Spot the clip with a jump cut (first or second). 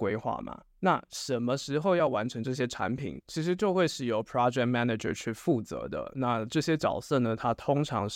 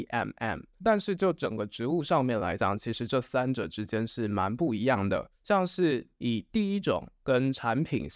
second